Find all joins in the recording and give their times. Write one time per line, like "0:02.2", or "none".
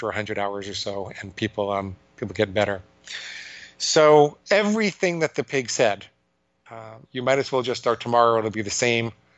0:02.0
0:04.4
0:07.0